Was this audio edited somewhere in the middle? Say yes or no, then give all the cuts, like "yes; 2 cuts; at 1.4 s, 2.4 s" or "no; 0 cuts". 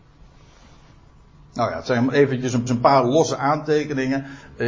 yes; 1 cut; at 2.7 s